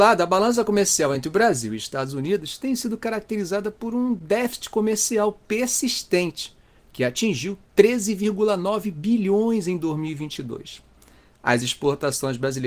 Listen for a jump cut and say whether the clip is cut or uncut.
uncut